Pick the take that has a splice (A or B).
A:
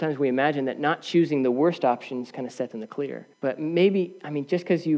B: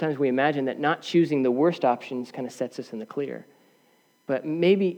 A